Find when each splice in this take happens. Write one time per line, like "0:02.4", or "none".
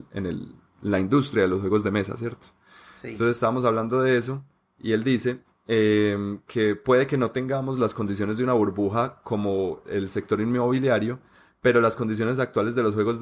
none